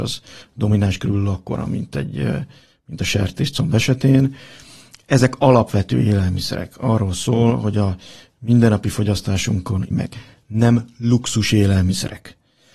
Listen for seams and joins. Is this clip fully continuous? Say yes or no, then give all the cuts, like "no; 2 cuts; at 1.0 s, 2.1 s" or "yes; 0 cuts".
no; 1 cut; at 9.9 s